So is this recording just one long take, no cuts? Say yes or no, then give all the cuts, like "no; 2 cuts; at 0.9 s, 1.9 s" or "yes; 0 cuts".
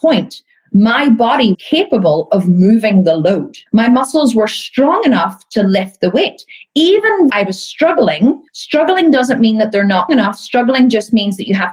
no; 5 cuts; at 1.5 s, 3.7 s, 7.3 s, 8.5 s, 10.1 s